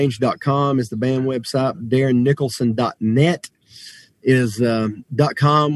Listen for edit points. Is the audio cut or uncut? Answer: uncut